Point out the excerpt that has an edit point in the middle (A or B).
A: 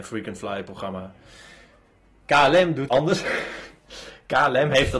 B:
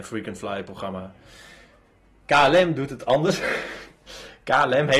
A